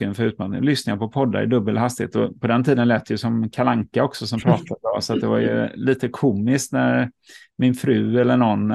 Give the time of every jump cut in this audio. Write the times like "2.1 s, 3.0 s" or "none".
none